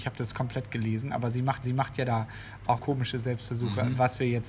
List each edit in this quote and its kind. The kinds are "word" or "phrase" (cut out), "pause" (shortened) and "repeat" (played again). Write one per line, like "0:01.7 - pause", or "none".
0:01.6 - repeat
0:02.8 - word